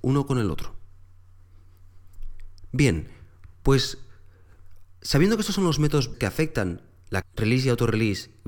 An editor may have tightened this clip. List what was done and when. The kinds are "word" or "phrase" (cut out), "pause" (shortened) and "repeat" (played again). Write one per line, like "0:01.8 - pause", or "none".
0:06.1 - word
0:07.2 - word